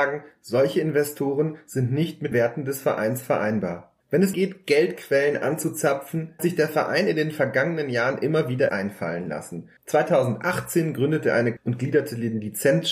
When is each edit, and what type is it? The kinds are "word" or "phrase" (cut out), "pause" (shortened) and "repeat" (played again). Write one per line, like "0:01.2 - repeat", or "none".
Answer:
0:02.3 - word
0:04.0 - pause
0:04.3 - word
0:06.4 - word
0:08.7 - word
0:09.8 - pause
0:11.6 - phrase